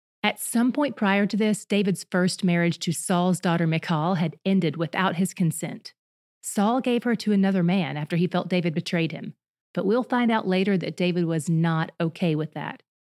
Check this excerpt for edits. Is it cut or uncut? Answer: uncut